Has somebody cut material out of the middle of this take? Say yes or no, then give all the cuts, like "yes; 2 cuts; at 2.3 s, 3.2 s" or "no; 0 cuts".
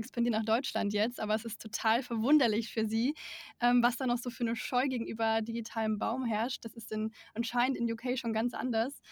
no; 0 cuts